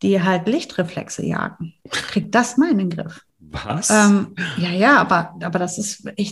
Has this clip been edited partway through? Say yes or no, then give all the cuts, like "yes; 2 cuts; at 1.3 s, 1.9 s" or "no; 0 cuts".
yes; 3 cuts; at 1.8 s, 2.6 s, 3.3 s